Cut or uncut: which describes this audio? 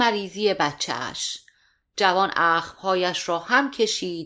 uncut